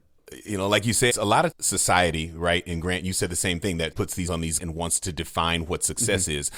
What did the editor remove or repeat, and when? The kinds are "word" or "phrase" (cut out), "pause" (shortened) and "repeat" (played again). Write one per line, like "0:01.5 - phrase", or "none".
0:01.1 - word
0:01.5 - word
0:03.9 - word
0:04.3 - word
0:04.6 - word